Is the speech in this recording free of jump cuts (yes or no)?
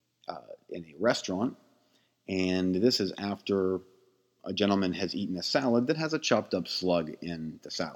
no